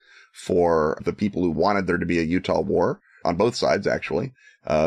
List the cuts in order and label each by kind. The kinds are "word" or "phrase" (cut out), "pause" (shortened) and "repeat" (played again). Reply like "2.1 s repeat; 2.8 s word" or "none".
1.0 s word